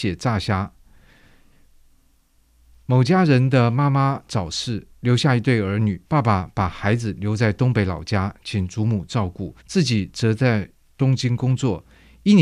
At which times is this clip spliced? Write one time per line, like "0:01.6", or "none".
0:06.1
0:09.6